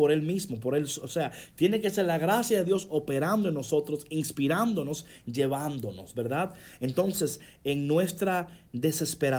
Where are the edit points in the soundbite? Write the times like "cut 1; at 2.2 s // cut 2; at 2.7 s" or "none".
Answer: none

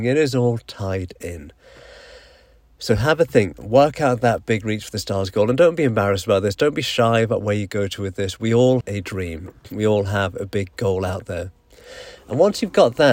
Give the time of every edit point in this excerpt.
cut 1; at 8.8 s

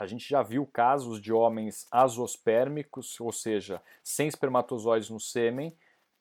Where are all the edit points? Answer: none

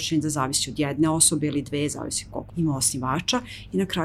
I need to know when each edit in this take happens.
cut 1; at 2.5 s

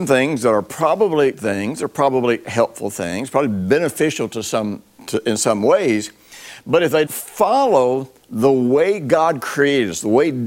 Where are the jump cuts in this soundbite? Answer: cut 1; at 1.3 s // cut 2; at 5.0 s // cut 3; at 7.1 s

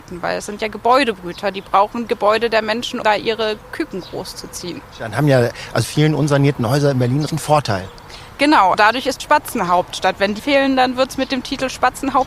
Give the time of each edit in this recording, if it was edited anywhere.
cut 1; at 2.1 s // cut 2; at 3.0 s // cut 3; at 5.8 s // cut 4; at 7.3 s // cut 5; at 8.7 s // cut 6; at 9.2 s // cut 7; at 10.4 s

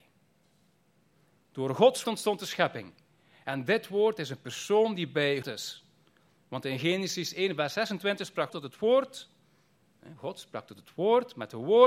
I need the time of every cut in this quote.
cut 1; at 2.0 s // cut 2; at 5.4 s // cut 3; at 8.5 s

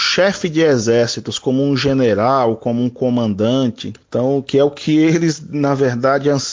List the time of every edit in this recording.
cut 1; at 4.0 s

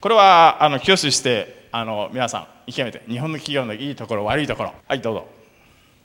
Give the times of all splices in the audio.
cut 1; at 4.8 s

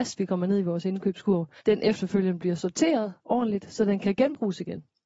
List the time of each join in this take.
cut 1; at 1.6 s

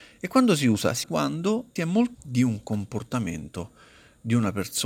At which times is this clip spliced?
cut 1; at 1.0 s // cut 2; at 1.8 s // cut 3; at 2.1 s

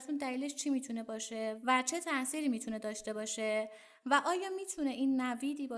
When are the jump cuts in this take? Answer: none

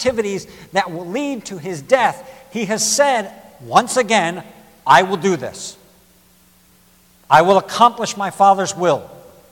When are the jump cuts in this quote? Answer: none

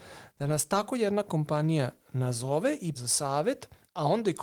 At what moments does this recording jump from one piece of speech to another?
cut 1; at 3.0 s

